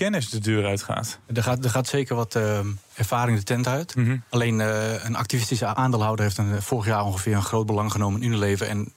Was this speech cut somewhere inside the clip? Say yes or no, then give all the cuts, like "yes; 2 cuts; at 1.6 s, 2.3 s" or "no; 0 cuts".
yes; 1 cut; at 1.2 s